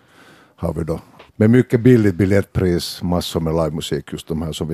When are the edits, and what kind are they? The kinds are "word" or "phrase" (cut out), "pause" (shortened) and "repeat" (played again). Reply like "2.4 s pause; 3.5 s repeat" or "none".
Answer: 1.3 s pause